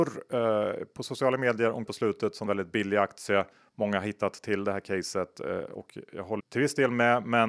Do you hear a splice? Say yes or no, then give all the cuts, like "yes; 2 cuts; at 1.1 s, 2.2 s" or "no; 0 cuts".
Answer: yes; 3 cuts; at 1.9 s, 2.5 s, 6.4 s